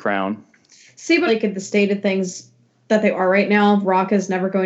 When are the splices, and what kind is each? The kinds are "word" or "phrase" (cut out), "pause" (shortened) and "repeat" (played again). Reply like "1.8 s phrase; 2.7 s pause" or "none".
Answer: 1.3 s phrase; 2.9 s word